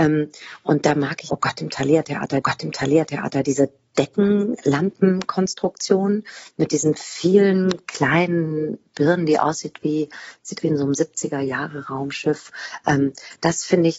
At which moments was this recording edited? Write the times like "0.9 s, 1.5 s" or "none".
1.3 s, 2.4 s, 10.6 s